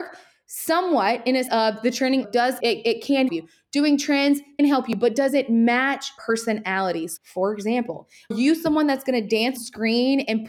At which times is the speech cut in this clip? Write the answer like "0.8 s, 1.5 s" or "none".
1.5 s, 2.2 s, 2.6 s, 3.3 s, 4.6 s, 6.2 s, 7.2 s, 8.3 s, 9.6 s